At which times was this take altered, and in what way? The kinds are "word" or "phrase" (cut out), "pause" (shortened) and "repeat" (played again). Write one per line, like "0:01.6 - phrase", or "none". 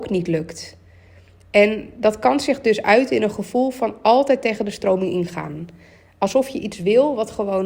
none